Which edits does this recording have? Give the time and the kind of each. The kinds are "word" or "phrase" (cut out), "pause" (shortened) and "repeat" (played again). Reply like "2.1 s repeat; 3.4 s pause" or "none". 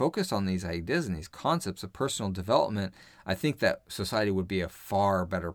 none